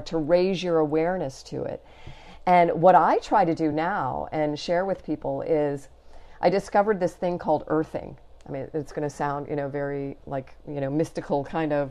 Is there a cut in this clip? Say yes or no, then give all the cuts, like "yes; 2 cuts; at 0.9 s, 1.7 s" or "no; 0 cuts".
no; 0 cuts